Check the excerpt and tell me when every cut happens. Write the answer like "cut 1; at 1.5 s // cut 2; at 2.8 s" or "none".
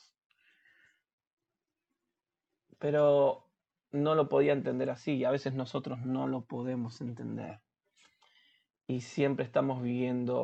none